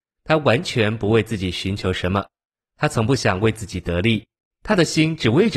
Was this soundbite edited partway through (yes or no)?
no